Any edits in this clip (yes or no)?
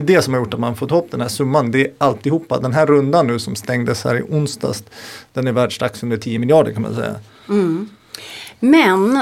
no